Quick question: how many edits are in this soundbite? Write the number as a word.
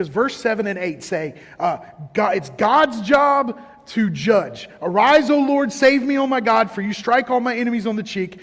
zero